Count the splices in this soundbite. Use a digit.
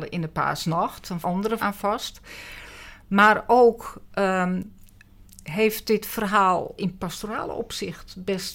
4